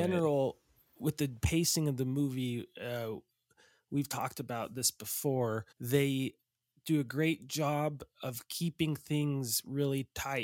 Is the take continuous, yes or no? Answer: no